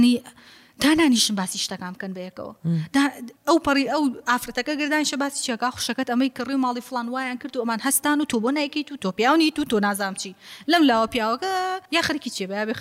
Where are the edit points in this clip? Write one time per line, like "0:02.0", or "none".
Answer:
0:03.4
0:11.9